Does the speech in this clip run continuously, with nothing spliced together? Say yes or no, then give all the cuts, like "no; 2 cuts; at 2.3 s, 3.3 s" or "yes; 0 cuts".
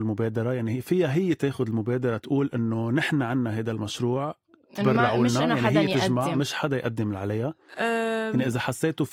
yes; 0 cuts